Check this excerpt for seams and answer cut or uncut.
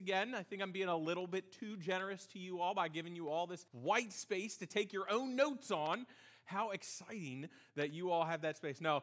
cut